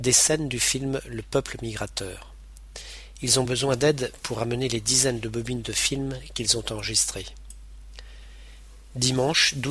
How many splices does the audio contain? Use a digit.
0